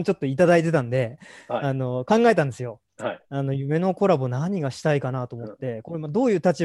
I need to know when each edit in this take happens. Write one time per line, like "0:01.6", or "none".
0:02.9